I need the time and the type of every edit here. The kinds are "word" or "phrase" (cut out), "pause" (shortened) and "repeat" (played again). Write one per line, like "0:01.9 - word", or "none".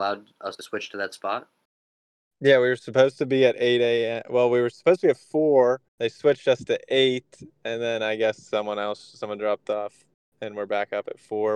0:05.9 - pause

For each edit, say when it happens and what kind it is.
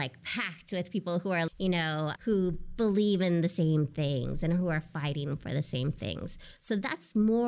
0:01.5 - word
0:02.2 - word

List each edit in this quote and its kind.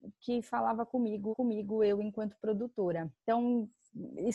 0:01.3 - repeat
0:03.2 - pause

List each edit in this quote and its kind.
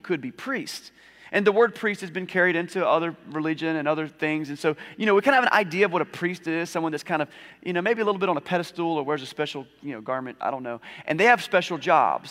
none

